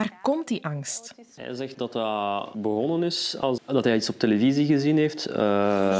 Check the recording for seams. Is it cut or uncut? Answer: cut